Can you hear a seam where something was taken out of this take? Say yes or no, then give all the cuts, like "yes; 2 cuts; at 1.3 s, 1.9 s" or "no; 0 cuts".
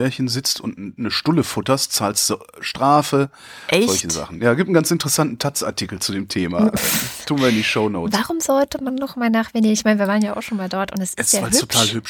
no; 0 cuts